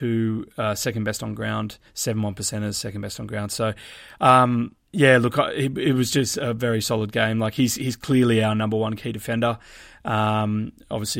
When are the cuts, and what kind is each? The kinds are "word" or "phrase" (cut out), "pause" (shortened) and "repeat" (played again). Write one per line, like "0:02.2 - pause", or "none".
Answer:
0:01.9 - pause
0:04.8 - pause